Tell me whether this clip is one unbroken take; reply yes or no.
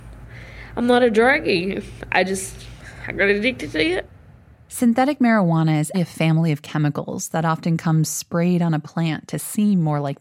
no